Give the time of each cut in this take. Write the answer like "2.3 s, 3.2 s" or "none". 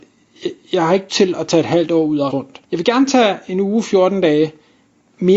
1.1 s, 2.3 s, 2.6 s